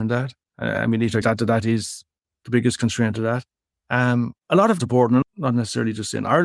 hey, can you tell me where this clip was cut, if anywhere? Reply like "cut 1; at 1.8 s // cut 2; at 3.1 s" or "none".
cut 1; at 1.2 s // cut 2; at 2.3 s // cut 3; at 4.4 s // cut 4; at 4.8 s // cut 5; at 5.2 s